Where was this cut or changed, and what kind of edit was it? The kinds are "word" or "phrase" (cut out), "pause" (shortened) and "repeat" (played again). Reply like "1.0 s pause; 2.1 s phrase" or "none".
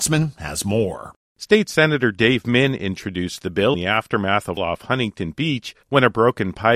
3.7 s word; 4.6 s phrase; 5.8 s pause